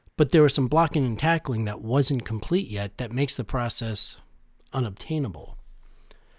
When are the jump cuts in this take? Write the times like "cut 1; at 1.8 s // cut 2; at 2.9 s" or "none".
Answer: none